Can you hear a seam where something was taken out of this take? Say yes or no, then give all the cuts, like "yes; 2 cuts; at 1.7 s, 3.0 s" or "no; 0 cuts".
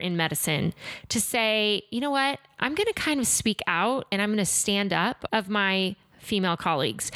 yes; 1 cut; at 5.3 s